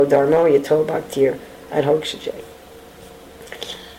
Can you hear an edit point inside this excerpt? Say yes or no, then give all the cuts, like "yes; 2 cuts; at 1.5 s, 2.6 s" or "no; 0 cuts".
no; 0 cuts